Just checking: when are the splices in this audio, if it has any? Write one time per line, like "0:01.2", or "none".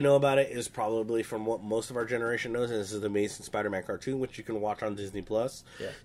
none